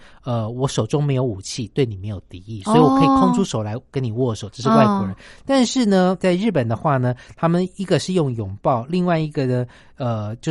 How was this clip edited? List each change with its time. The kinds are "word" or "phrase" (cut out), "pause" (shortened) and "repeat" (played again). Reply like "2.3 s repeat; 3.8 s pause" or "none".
6.2 s word

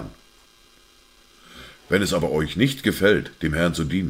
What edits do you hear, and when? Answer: none

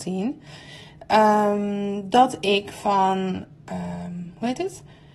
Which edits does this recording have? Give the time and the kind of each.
none

